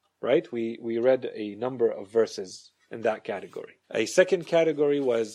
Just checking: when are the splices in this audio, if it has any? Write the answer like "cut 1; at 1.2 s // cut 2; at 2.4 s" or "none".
cut 1; at 3.8 s